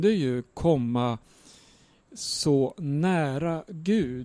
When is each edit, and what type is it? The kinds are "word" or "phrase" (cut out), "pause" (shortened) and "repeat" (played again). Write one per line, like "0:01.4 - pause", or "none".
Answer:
none